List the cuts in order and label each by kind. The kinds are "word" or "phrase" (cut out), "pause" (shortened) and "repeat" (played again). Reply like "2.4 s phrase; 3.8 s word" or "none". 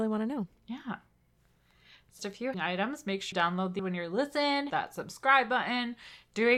2.2 s word; 2.5 s word; 3.3 s word; 3.8 s word; 4.7 s word

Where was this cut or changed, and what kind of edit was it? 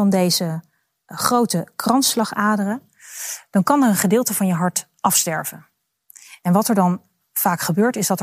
none

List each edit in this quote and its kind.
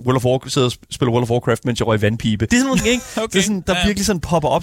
2.5 s word; 2.8 s word; 3.6 s word

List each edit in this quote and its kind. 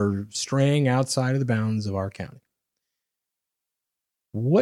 none

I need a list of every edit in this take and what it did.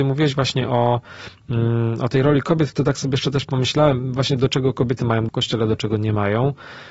5.3 s word

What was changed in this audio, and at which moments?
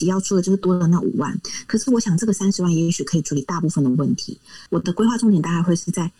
4.7 s pause

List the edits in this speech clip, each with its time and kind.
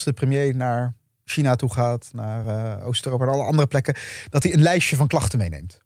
none

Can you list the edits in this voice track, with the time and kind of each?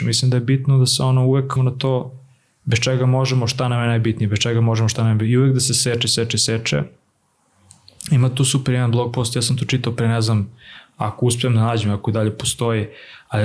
1.6 s word

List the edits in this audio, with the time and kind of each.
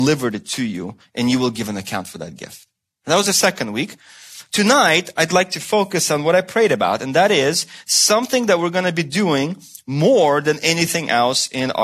none

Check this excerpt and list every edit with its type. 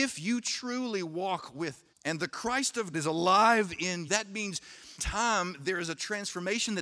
1.9 s word; 2.9 s word; 4.1 s word; 5.0 s word

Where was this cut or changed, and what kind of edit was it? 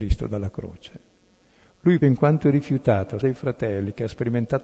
2.0 s word; 3.2 s word

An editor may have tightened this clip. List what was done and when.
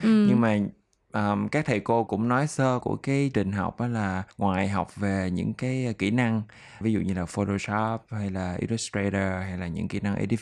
2.1 s word; 2.8 s phrase; 3.3 s word; 4.3 s pause; 6.8 s word

